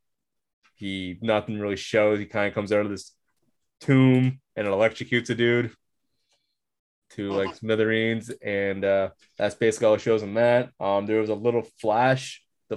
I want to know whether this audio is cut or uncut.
cut